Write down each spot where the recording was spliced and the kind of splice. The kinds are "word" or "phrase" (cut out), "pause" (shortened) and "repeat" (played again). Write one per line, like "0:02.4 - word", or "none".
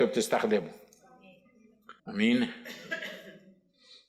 0:02.0 - pause

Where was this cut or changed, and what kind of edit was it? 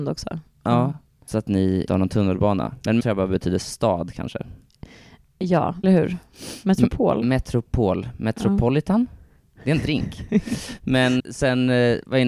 0:01.3 - word
0:01.9 - word
0:03.0 - word
0:05.8 - word
0:11.2 - word

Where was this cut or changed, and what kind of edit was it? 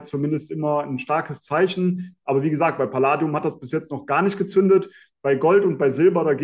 none

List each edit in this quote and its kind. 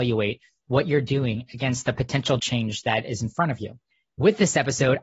0:02.4 - word

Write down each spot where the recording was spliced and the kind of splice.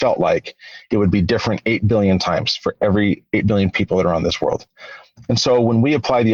none

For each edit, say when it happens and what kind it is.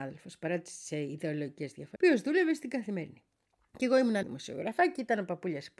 0:02.0 - word
0:03.5 - pause
0:04.2 - word

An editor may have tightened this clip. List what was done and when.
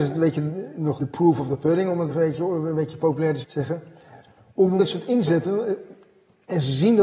0:01.0 - word
0:02.1 - word
0:03.4 - word
0:04.8 - word

